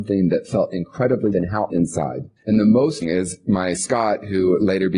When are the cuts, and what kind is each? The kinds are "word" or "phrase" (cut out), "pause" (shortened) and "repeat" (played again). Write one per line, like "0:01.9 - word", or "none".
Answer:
0:01.3 - word
0:01.7 - phrase
0:02.4 - pause
0:03.0 - phrase
0:03.7 - word